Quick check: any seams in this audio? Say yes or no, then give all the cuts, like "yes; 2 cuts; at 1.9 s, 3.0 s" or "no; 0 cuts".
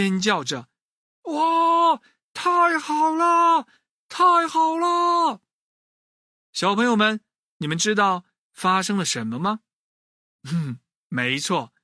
no; 0 cuts